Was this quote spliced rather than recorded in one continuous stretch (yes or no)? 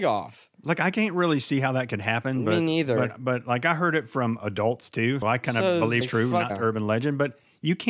yes